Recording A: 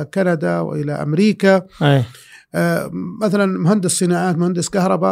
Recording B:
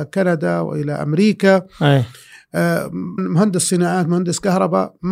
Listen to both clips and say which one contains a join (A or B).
B